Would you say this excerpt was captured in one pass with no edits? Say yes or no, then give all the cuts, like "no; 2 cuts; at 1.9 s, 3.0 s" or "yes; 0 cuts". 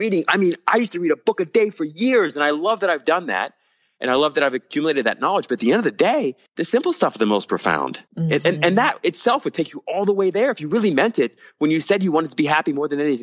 no; 2 cuts; at 6.5 s, 8.1 s